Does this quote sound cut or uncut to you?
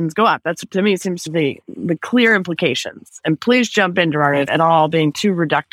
cut